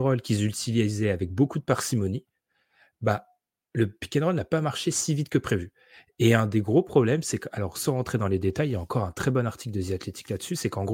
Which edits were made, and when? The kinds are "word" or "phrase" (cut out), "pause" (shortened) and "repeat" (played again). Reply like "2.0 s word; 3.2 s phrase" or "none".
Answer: none